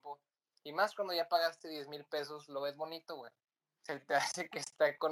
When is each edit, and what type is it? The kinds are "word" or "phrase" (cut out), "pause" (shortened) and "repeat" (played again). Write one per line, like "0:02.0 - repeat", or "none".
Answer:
none